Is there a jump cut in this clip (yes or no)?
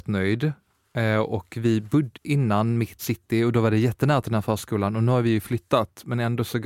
yes